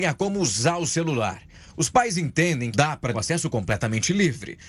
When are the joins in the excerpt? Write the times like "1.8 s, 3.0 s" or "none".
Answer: 2.7 s, 3.1 s